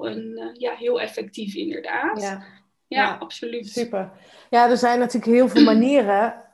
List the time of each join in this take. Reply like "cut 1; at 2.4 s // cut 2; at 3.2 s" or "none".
none